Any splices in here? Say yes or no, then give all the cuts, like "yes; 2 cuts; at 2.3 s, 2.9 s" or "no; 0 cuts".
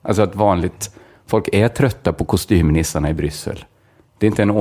no; 0 cuts